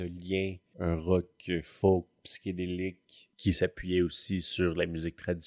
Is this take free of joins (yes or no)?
yes